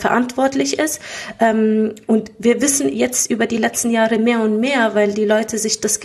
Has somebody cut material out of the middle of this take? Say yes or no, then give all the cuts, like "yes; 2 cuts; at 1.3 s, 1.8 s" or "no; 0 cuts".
yes; 1 cut; at 2.9 s